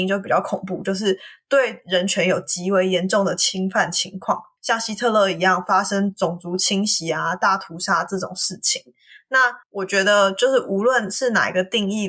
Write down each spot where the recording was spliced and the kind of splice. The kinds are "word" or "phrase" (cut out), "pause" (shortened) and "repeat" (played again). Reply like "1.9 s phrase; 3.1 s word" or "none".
9.6 s pause